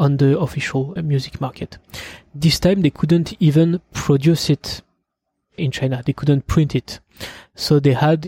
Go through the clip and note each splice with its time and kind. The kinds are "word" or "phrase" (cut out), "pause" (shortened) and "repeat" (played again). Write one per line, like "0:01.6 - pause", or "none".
0:01.0 - word
0:05.6 - word